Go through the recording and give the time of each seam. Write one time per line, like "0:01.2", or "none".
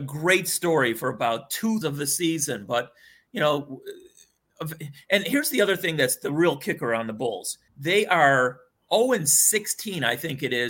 0:01.8
0:07.7